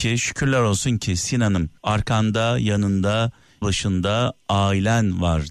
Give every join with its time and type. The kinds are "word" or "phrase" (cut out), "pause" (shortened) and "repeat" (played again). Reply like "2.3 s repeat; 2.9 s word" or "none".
1.8 s pause; 3.6 s word